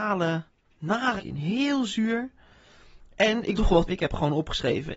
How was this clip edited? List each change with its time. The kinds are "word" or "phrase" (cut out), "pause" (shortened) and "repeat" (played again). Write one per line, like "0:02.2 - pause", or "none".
0:01.2 - word
0:03.6 - word
0:03.9 - word